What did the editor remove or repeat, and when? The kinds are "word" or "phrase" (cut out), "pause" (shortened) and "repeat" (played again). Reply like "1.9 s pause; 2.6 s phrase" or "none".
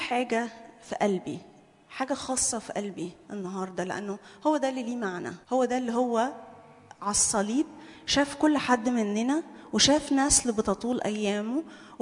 5.4 s pause